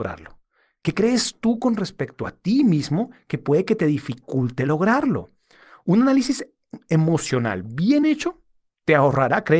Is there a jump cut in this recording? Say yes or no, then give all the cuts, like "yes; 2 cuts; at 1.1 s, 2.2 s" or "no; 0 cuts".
no; 0 cuts